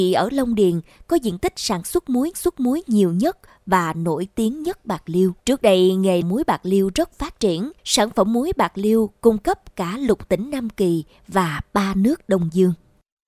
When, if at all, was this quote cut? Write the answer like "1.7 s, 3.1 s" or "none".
2.3 s, 5.4 s, 6.2 s, 7.8 s